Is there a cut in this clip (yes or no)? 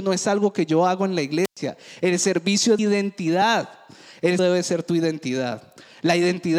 yes